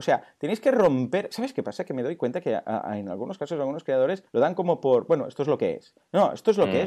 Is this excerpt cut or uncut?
cut